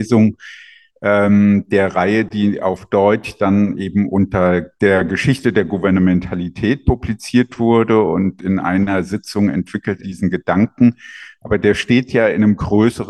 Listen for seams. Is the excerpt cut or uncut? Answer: cut